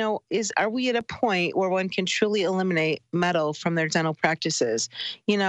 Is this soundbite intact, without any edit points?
yes; 0 cuts

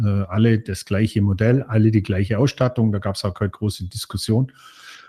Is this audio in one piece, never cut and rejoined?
yes; 0 cuts

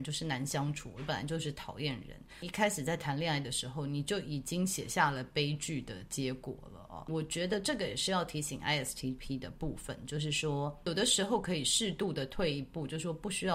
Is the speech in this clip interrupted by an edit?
no; 0 cuts

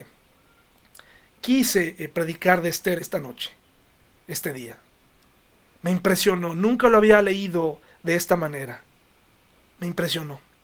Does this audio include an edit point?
yes; 1 cut; at 3.0 s

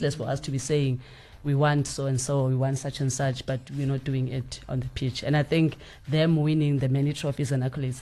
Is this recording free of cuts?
no; 1 cut; at 1.4 s

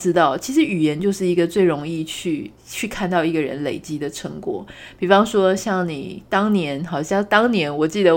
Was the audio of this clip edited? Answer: yes; 1 cut; at 2.6 s

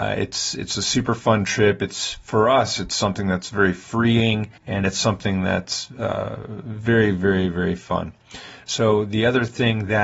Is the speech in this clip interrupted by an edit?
yes; 1 cut; at 4.6 s

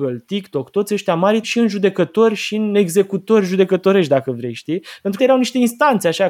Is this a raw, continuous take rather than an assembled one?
no; 2 cuts; at 1.4 s, 5.2 s

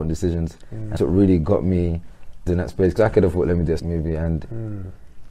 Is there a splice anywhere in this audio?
yes; 4 cuts; at 1.0 s, 2.5 s, 3.0 s, 3.8 s

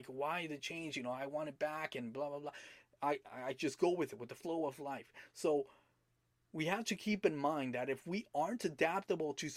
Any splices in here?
no; 0 cuts

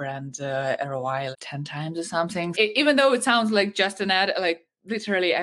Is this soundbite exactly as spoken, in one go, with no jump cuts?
no; 2 cuts; at 1.3 s, 2.5 s

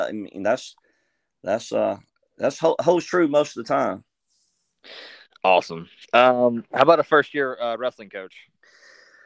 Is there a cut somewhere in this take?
no; 0 cuts

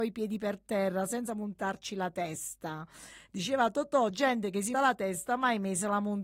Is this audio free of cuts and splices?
no; 2 cuts; at 4.1 s, 4.7 s

